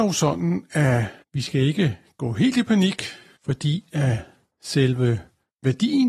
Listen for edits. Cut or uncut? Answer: uncut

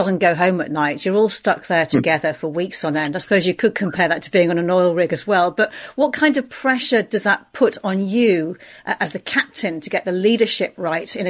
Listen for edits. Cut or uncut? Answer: uncut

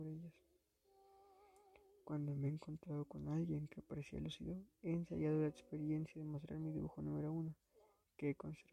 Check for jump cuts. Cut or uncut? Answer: uncut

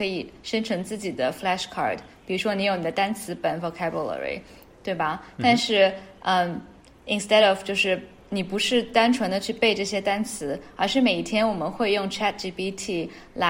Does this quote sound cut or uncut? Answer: uncut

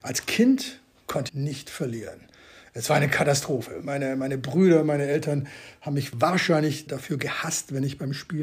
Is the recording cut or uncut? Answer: cut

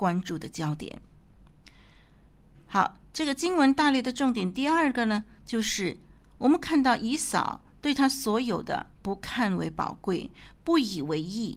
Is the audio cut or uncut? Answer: cut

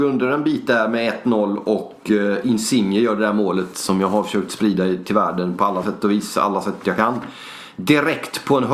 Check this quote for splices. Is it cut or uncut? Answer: uncut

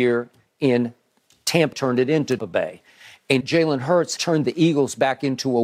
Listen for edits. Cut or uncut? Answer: cut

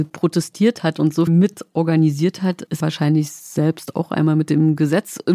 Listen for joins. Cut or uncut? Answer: cut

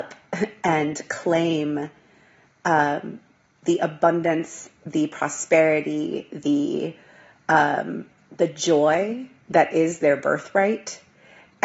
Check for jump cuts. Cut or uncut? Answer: uncut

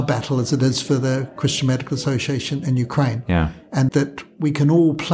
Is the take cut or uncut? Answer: cut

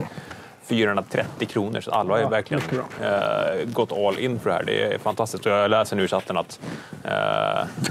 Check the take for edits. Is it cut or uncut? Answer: uncut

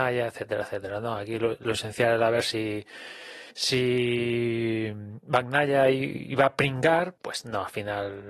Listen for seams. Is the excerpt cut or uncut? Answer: cut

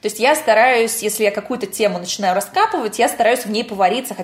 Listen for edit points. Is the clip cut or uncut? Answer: uncut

